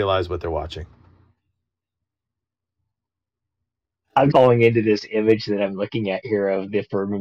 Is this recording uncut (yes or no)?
no